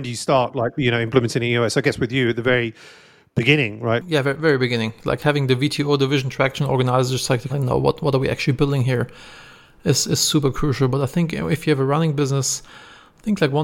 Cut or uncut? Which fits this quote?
cut